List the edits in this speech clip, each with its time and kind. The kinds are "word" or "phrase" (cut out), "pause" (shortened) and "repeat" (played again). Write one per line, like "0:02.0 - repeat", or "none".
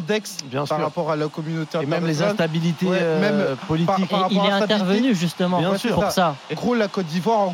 0:06.5 - word